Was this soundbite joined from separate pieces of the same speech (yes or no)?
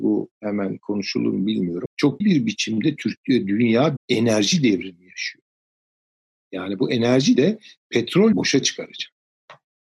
yes